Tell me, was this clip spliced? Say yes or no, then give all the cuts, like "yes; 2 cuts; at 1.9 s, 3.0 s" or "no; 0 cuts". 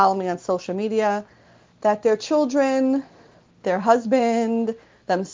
no; 0 cuts